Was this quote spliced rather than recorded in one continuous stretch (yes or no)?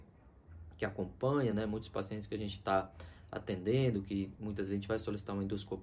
no